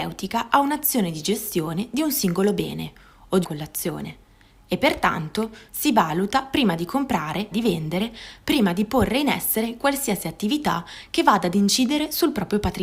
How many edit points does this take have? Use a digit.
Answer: 2